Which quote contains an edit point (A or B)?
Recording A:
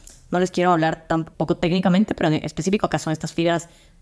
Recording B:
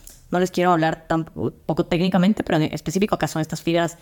A